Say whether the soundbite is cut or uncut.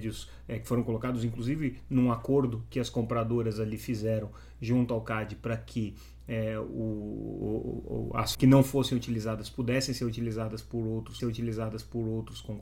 cut